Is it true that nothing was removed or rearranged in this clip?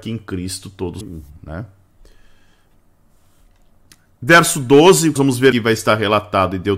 no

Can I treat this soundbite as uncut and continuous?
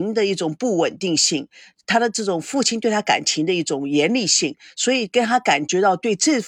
yes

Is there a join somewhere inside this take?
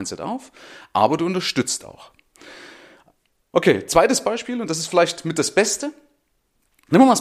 no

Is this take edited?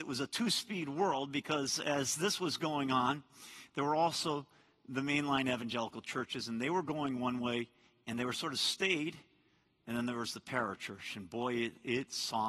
no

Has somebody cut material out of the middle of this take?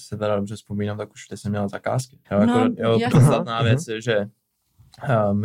yes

